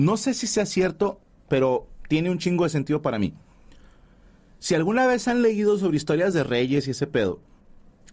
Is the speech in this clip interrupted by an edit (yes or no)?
no